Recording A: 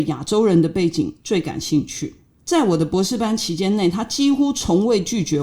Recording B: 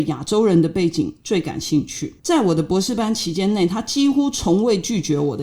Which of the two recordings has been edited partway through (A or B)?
B